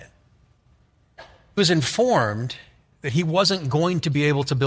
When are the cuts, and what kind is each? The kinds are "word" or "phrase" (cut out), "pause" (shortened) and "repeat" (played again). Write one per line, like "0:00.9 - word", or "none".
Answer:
0:01.6 - word